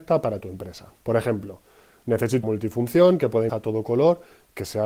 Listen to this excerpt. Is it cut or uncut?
cut